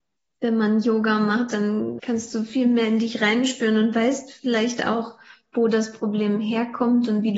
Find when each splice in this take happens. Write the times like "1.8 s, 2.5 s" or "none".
2.0 s